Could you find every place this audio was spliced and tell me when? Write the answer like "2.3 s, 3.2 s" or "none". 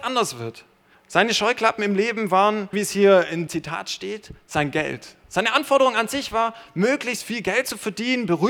0.9 s, 2.7 s, 3.5 s